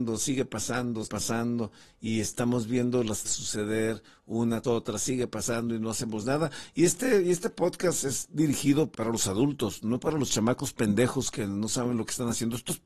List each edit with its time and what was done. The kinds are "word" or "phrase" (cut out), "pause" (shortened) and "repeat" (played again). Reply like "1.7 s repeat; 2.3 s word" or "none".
1.0 s word; 3.2 s word; 4.6 s word; 8.9 s word